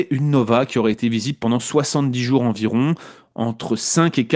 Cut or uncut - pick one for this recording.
uncut